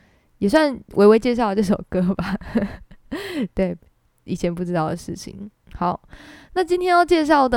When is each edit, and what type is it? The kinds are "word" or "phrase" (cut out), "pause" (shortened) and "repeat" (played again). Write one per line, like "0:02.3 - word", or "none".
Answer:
none